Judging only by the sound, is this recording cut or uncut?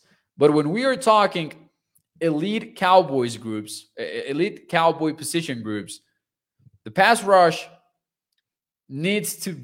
uncut